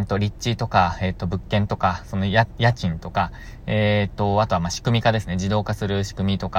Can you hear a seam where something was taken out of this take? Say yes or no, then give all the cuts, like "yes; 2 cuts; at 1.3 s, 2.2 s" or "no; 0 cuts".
no; 0 cuts